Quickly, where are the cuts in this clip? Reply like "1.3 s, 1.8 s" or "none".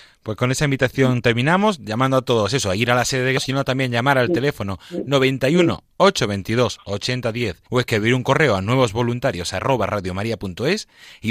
3.4 s, 7.7 s